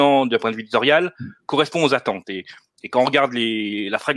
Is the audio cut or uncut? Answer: uncut